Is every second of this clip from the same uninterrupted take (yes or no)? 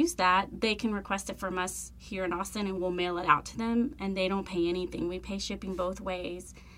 yes